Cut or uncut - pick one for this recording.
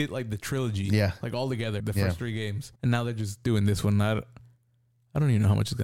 cut